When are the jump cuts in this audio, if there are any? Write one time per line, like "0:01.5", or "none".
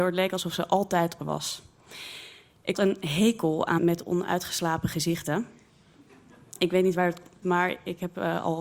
0:01.2
0:02.7
0:03.8
0:07.4